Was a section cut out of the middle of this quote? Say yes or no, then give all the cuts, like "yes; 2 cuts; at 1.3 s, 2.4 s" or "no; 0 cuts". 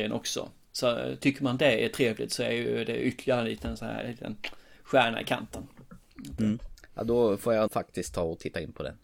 yes; 1 cut; at 7.7 s